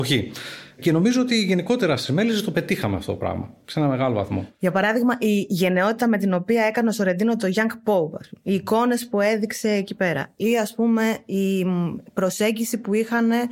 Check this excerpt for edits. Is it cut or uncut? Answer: cut